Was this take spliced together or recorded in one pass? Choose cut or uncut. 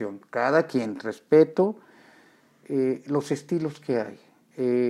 uncut